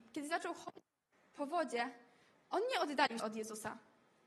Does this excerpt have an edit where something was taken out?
yes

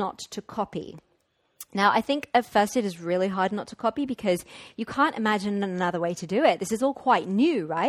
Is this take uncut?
yes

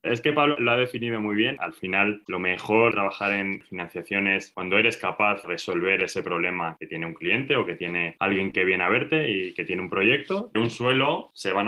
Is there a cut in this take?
yes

